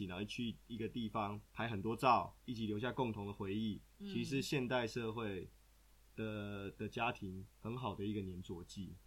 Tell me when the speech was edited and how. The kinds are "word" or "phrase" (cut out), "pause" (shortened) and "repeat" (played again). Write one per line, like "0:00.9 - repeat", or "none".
0:01.5 - pause
0:02.4 - pause
0:07.5 - pause